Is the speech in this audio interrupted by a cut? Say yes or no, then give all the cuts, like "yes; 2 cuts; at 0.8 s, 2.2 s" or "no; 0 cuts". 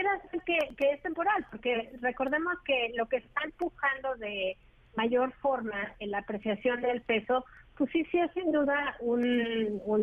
no; 0 cuts